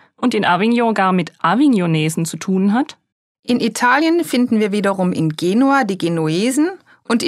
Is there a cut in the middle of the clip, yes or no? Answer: yes